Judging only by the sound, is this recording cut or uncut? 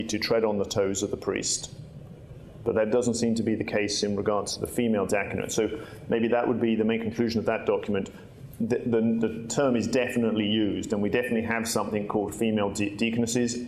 uncut